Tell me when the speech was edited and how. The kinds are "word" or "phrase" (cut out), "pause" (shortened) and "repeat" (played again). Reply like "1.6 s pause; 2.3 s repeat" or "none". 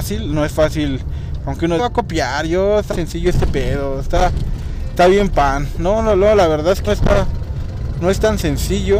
1.8 s phrase; 2.9 s word; 6.9 s word